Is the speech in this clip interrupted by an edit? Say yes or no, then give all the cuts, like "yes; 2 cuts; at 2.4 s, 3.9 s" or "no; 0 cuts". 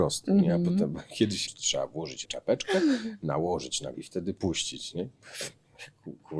yes; 3 cuts; at 1.5 s, 2.2 s, 3.9 s